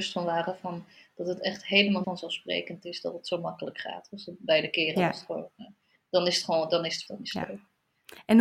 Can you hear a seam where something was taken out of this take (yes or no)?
yes